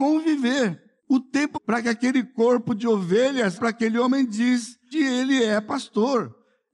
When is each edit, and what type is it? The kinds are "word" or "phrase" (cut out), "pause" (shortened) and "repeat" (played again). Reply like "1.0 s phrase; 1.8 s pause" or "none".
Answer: 1.0 s pause; 1.5 s phrase; 3.6 s word; 4.9 s word